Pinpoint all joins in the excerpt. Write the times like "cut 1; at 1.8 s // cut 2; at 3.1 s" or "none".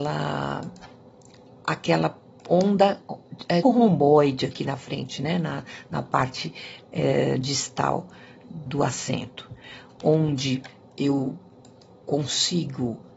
cut 1; at 3.6 s // cut 2; at 8.7 s